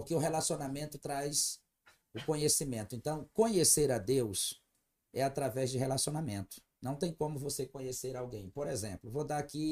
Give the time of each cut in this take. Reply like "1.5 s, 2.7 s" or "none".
none